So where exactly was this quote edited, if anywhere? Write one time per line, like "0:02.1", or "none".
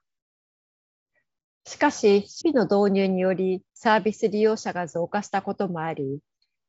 0:02.4
0:03.7